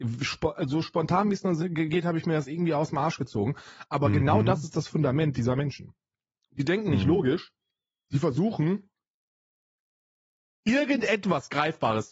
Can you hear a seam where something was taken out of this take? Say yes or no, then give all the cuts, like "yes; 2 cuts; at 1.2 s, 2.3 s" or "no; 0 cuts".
no; 0 cuts